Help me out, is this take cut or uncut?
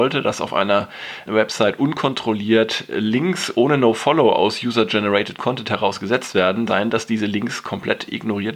cut